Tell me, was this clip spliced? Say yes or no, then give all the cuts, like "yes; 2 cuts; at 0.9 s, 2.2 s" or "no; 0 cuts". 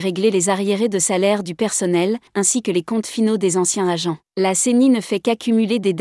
yes; 2 cuts; at 2.3 s, 4.3 s